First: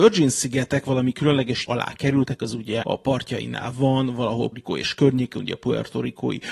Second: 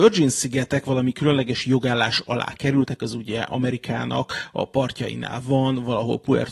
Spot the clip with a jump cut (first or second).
first